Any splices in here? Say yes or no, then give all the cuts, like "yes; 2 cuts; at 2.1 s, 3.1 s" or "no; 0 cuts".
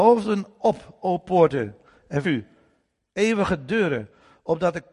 yes; 1 cut; at 2.2 s